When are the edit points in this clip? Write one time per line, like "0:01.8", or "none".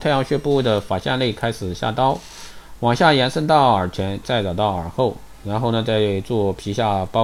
0:04.2